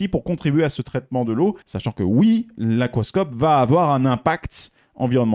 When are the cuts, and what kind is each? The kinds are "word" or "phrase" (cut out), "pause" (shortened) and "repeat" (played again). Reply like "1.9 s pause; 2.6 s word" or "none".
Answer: 1.6 s pause